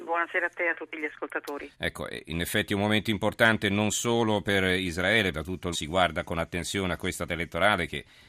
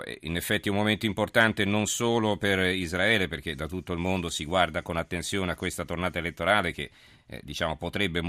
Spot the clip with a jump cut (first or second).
first